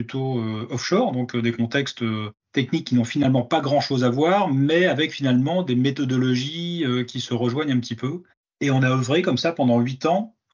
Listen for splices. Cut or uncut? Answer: uncut